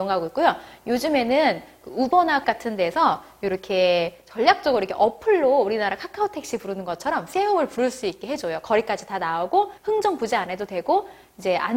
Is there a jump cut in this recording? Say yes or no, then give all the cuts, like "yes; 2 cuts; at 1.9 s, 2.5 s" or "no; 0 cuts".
yes; 2 cuts; at 2.4 s, 9.8 s